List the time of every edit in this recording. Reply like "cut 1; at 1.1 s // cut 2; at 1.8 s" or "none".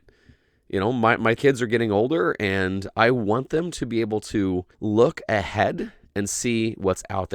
cut 1; at 1.4 s // cut 2; at 4.7 s